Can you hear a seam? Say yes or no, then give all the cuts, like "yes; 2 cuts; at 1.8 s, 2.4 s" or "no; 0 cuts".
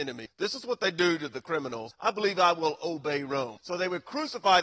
no; 0 cuts